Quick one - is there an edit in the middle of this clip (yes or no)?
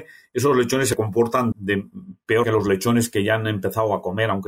yes